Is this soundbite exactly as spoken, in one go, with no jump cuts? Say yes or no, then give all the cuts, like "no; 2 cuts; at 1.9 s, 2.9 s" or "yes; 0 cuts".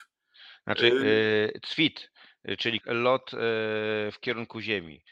no; 1 cut; at 2.8 s